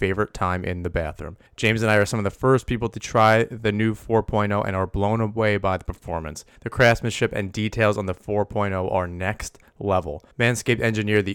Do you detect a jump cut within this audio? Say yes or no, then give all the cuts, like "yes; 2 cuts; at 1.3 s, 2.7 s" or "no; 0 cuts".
yes; 3 cuts; at 1.5 s, 6.6 s, 10.3 s